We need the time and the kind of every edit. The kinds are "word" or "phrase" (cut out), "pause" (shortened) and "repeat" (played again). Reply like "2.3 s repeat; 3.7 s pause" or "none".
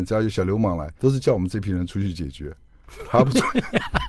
1.0 s pause